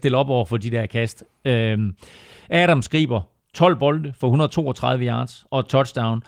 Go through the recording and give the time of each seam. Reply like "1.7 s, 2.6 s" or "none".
none